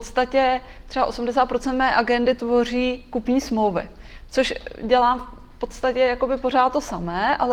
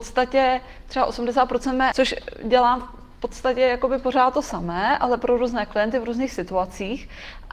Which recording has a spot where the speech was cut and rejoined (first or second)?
second